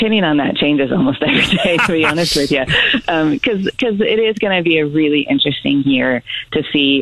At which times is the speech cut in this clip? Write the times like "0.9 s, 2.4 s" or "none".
none